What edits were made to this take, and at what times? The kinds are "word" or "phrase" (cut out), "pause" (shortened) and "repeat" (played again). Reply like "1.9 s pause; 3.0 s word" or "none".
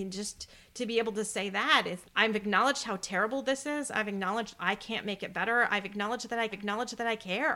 2.0 s word; 6.5 s repeat